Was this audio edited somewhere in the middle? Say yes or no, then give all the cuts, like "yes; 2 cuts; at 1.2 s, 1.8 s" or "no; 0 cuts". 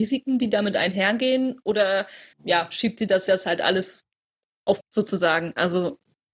yes; 3 cuts; at 2.3 s, 3.3 s, 4.8 s